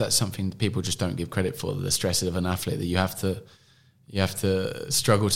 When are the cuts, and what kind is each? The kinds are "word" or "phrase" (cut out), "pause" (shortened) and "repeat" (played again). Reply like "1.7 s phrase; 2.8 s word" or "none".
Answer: none